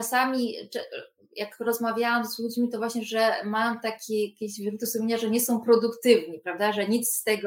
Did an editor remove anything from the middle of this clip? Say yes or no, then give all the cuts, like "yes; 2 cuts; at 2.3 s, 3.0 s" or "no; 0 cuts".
no; 0 cuts